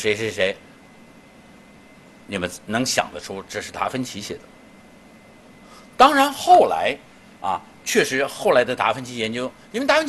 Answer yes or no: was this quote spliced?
no